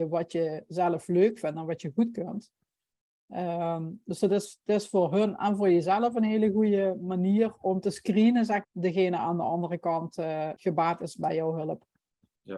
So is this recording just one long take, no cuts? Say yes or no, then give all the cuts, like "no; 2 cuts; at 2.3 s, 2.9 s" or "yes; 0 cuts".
no; 2 cuts; at 8.6 s, 10.6 s